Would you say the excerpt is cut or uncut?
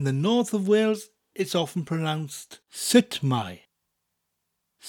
cut